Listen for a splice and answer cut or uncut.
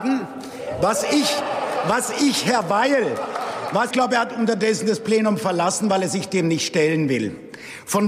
cut